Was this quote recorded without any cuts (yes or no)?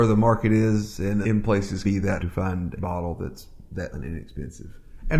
no